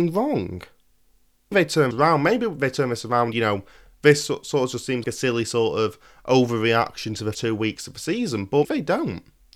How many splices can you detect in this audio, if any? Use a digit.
6